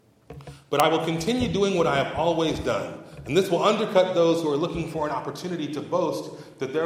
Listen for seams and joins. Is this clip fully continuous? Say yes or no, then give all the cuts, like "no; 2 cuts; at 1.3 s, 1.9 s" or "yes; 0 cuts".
yes; 0 cuts